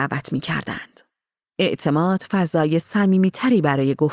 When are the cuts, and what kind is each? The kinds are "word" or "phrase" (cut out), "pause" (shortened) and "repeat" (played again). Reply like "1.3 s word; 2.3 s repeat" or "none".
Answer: none